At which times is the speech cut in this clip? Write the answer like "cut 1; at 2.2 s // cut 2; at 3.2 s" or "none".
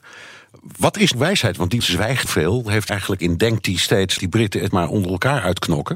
cut 1; at 1.1 s // cut 2; at 1.8 s // cut 3; at 2.2 s // cut 4; at 2.9 s // cut 5; at 3.2 s // cut 6; at 4.2 s // cut 7; at 4.7 s